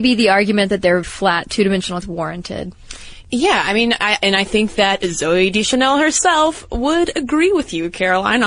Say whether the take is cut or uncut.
cut